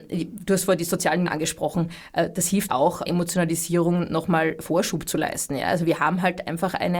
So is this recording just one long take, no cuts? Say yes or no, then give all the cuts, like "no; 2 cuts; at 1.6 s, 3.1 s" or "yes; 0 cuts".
no; 3 cuts; at 1.3 s, 2.7 s, 3.1 s